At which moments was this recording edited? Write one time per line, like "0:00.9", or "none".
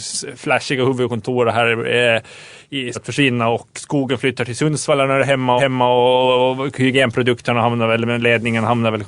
0:02.9
0:03.7
0:05.6